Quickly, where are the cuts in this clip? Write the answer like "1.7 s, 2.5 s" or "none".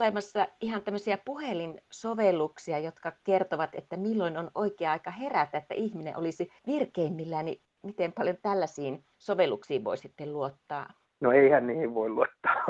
6.6 s, 9.1 s